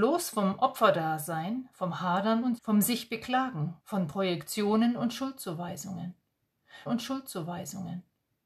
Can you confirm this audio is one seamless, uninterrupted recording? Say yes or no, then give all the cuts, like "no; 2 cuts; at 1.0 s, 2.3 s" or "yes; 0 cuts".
no; 3 cuts; at 2.6 s, 3.8 s, 6.9 s